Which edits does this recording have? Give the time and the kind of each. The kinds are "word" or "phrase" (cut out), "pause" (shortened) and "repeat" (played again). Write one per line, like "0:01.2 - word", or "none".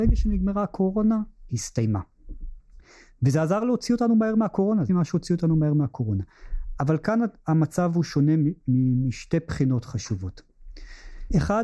0:01.5 - phrase
0:04.9 - phrase